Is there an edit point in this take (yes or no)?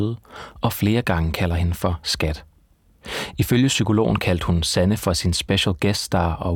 no